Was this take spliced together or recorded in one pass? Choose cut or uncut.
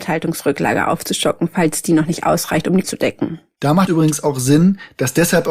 cut